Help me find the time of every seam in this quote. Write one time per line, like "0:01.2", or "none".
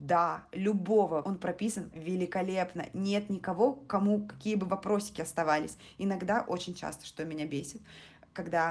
0:01.2
0:01.9